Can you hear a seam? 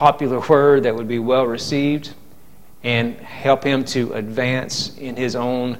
no; 0 cuts

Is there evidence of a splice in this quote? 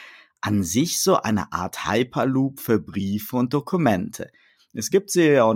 no; 0 cuts

